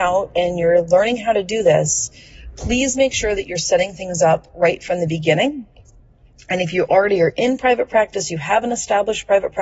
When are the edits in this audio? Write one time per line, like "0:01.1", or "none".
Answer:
none